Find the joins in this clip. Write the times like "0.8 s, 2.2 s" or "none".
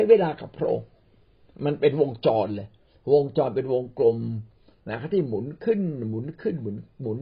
none